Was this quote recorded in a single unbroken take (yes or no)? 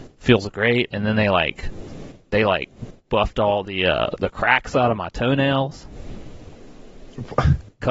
yes